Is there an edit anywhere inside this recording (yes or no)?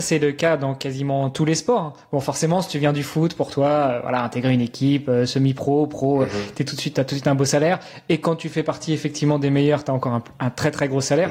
no